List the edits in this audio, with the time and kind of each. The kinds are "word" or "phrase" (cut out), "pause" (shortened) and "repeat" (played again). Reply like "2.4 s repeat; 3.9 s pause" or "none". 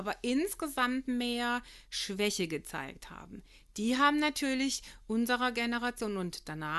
none